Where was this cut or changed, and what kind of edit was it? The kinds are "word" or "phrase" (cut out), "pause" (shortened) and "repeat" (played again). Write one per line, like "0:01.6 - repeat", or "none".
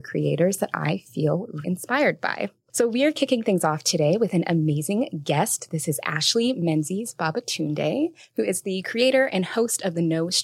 0:01.6 - word